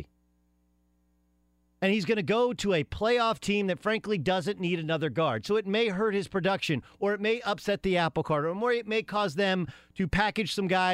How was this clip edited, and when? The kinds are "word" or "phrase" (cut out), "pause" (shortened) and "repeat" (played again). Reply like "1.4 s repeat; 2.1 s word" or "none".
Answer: none